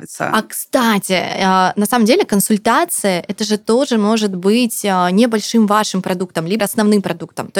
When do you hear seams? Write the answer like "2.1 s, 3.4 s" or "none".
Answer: 6.6 s